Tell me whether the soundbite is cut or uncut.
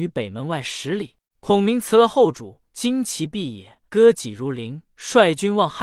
cut